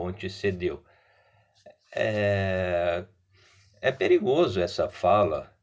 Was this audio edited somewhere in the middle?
no; 0 cuts

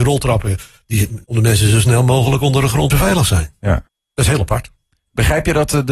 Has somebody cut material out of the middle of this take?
yes; 3 cuts; at 1.2 s, 2.9 s, 3.9 s

